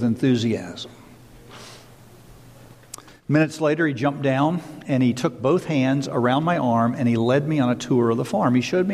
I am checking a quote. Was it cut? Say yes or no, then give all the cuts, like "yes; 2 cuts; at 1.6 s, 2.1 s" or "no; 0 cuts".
no; 0 cuts